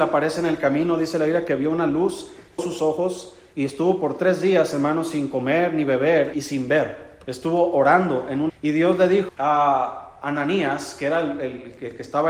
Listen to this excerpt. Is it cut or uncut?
cut